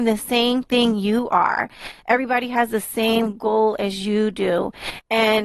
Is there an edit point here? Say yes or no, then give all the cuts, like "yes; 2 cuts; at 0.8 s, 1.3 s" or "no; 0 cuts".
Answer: no; 0 cuts